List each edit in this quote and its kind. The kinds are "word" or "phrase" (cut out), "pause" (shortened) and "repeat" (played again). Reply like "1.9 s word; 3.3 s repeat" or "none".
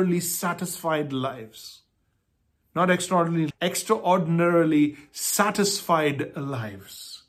3.5 s word

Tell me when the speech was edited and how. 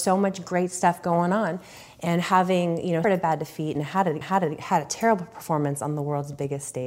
3.0 s word; 4.2 s repeat

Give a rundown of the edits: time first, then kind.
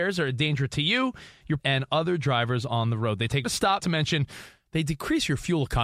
1.6 s word; 3.4 s word; 3.8 s word

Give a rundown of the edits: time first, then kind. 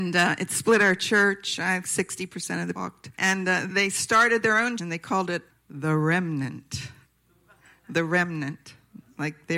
1.8 s word; 2.7 s word; 3.1 s pause; 3.7 s word; 4.8 s word; 5.5 s pause; 7.0 s pause

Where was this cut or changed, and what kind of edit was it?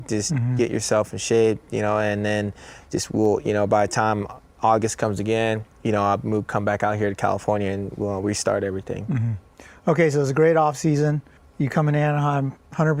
5.7 s pause; 11.4 s pause

